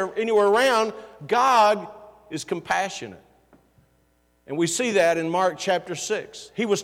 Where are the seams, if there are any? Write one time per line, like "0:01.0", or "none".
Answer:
none